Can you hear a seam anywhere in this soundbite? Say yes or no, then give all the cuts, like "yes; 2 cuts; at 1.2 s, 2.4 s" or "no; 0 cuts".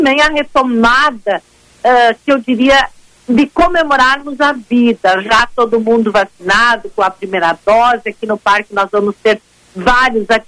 no; 0 cuts